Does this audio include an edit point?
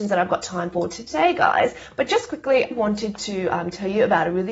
yes; 1 cut; at 2.7 s

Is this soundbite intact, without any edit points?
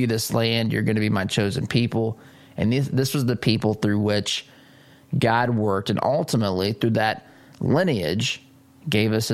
yes; 0 cuts

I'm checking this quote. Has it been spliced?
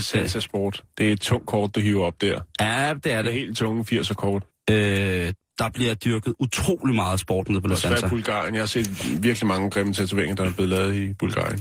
yes; 1 cut; at 4.5 s

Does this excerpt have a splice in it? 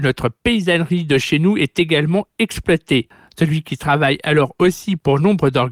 no; 0 cuts

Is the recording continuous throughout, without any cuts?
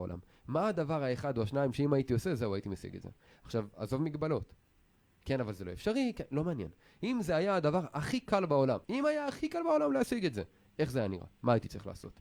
no; 1 cut; at 8.8 s

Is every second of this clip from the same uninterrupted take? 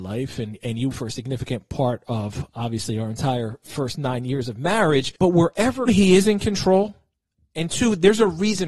no; 3 cuts; at 0.9 s, 5.2 s, 5.9 s

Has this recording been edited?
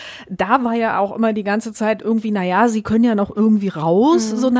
no; 0 cuts

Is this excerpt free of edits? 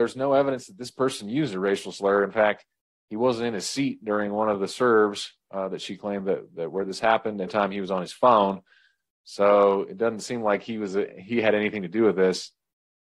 no; 1 cut; at 7.5 s

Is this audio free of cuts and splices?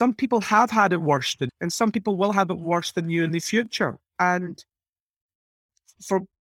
no; 2 cuts; at 1.5 s, 4.1 s

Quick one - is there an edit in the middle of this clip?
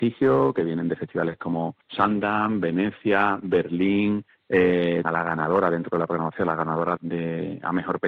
yes; 3 cuts; at 1.8 s, 5.0 s, 7.0 s

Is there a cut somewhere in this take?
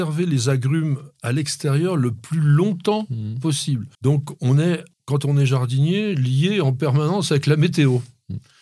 yes; 2 cuts; at 3.9 s, 4.9 s

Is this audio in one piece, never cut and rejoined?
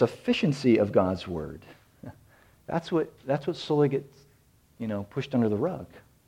yes; 0 cuts

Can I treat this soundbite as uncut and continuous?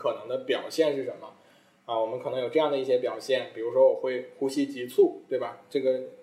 yes; 0 cuts

